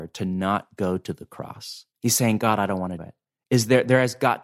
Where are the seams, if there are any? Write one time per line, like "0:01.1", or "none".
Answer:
0:01.9
0:03.0